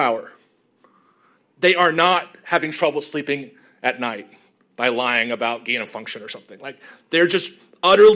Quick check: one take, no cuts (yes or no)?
yes